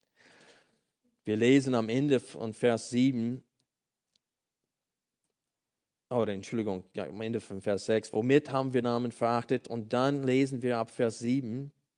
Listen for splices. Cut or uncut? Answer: cut